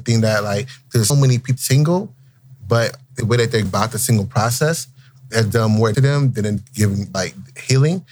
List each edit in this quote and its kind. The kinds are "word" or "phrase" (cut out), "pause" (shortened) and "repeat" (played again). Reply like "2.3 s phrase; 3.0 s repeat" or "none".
1.1 s word; 1.6 s word; 3.2 s word; 3.6 s word; 5.3 s word; 5.9 s word; 6.6 s word; 7.1 s word